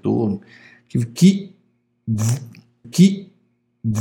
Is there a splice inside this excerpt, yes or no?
yes